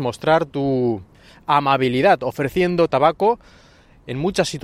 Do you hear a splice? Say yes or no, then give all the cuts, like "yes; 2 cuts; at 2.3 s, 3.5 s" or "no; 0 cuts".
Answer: no; 0 cuts